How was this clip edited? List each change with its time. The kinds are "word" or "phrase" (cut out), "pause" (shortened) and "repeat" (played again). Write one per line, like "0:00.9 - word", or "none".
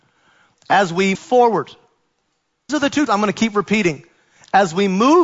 0:01.1 - word
0:02.7 - word
0:03.1 - word